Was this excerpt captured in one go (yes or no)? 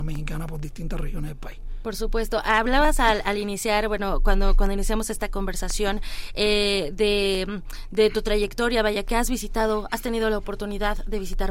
yes